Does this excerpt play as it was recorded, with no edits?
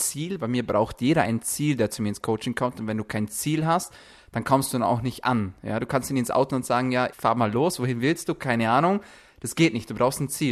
no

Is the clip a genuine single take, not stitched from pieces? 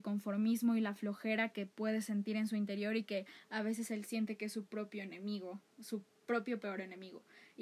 yes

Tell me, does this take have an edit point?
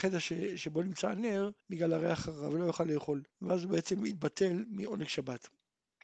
yes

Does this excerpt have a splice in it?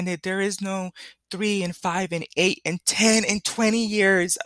no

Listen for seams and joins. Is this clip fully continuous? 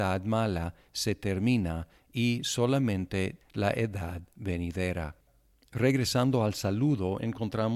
no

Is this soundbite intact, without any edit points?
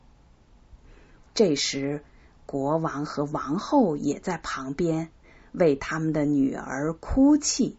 yes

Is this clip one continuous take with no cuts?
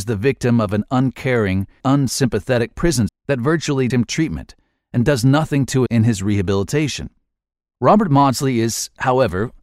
no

